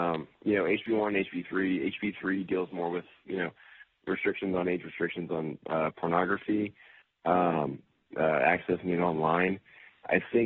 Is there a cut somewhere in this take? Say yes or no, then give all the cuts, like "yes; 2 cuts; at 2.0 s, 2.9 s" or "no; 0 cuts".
no; 0 cuts